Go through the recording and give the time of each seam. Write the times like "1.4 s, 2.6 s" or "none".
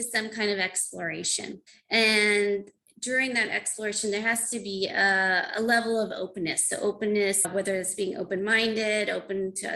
1.7 s